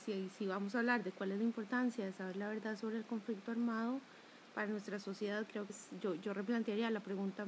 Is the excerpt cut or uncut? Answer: cut